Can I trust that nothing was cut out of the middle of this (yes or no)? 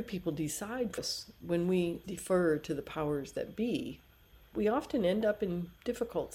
no